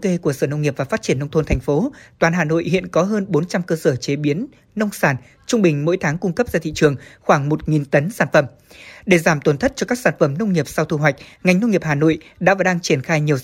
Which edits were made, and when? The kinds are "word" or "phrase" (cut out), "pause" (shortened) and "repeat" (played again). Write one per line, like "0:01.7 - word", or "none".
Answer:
none